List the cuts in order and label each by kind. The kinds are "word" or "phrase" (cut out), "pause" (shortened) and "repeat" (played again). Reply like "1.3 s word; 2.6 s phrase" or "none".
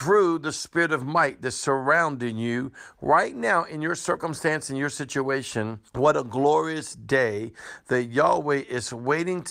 5.9 s pause